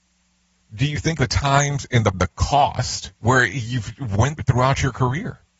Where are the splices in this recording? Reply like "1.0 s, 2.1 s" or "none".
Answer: 1.2 s, 2.1 s, 3.2 s, 4.4 s